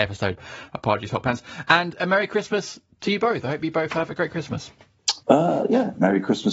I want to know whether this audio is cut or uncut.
uncut